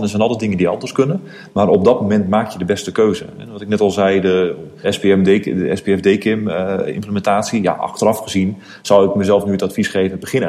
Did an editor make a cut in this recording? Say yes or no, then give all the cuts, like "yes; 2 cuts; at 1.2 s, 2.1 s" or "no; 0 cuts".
yes; 1 cut; at 4.8 s